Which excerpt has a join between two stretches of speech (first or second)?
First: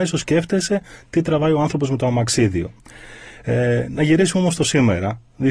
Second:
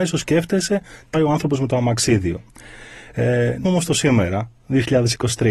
second